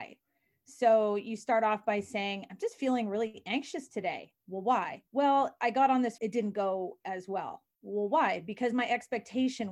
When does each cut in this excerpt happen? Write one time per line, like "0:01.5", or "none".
0:05.1
0:06.2